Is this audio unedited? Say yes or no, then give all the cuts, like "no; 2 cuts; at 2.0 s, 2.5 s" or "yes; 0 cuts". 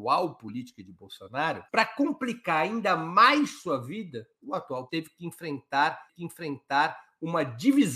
no; 3 cuts; at 1.7 s, 4.9 s, 6.1 s